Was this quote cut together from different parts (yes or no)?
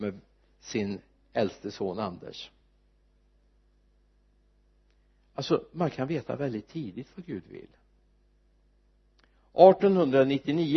no